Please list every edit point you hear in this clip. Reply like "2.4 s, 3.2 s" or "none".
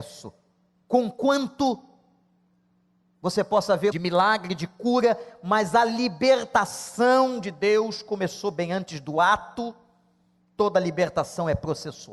3.9 s